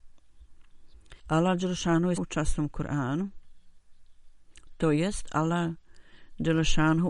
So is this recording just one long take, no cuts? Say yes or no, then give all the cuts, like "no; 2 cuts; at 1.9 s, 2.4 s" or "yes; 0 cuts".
no; 2 cuts; at 1.2 s, 2.2 s